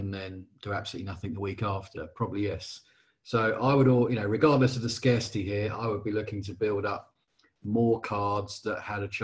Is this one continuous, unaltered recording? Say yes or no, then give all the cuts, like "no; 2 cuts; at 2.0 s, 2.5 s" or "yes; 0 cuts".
yes; 0 cuts